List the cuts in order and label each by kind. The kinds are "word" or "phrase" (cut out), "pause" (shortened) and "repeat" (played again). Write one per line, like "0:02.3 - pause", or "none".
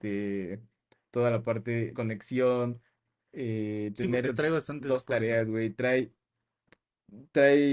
0:01.9 - word